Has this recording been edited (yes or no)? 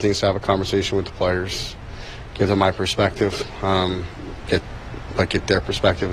no